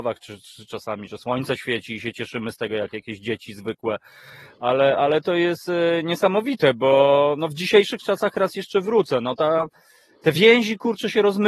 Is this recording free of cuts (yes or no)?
yes